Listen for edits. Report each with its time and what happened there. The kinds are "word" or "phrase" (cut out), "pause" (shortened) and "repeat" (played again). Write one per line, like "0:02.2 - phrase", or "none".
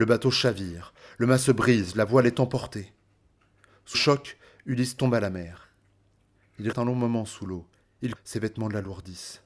0:03.9 - word
0:06.7 - word
0:08.2 - word